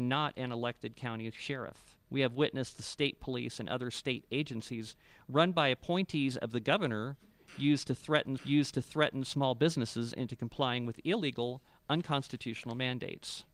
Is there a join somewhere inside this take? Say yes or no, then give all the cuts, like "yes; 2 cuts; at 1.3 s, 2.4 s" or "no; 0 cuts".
yes; 2 cuts; at 2.0 s, 8.4 s